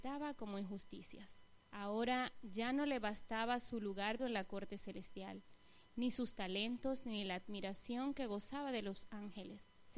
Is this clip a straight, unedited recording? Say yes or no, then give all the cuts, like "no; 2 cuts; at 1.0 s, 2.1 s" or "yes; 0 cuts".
no; 2 cuts; at 1.6 s, 4.2 s